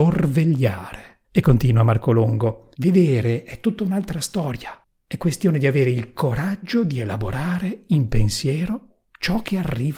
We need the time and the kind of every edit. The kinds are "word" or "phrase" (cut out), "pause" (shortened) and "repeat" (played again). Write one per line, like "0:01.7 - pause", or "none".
0:01.3 - pause
0:02.7 - pause